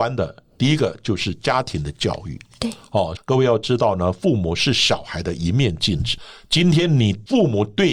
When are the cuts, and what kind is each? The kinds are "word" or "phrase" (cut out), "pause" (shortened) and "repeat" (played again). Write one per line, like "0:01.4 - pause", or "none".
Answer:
0:03.2 - phrase